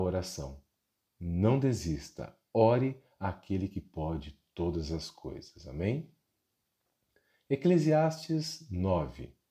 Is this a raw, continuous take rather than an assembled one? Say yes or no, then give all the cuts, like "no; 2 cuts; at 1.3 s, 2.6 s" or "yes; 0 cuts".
yes; 0 cuts